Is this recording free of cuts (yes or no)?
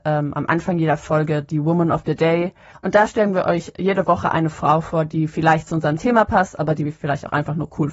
yes